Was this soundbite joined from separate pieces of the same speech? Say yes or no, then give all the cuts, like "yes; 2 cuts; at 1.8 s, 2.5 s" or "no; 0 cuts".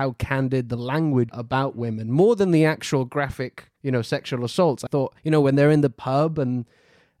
yes; 4 cuts; at 1.3 s, 3.8 s, 4.9 s, 5.2 s